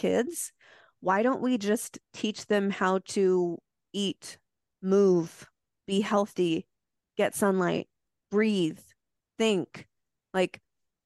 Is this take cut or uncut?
uncut